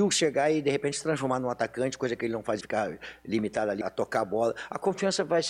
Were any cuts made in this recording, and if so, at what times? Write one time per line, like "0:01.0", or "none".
0:02.6
0:03.8